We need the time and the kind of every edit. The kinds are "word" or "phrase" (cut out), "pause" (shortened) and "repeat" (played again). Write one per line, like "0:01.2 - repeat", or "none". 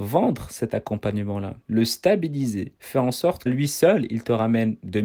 0:01.6 - pause
0:02.8 - pause
0:03.5 - word